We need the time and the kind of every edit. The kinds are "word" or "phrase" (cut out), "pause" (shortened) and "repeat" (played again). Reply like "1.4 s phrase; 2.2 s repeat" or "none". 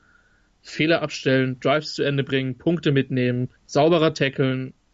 3.6 s pause